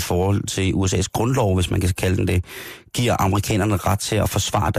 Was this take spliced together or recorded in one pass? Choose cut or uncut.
uncut